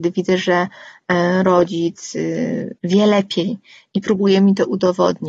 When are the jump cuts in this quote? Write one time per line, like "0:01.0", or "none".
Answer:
0:02.8